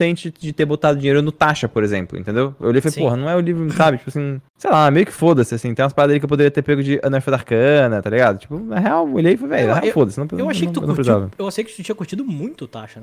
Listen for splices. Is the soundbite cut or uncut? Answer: cut